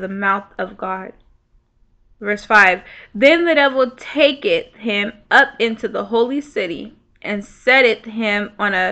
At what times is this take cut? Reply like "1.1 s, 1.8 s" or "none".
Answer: none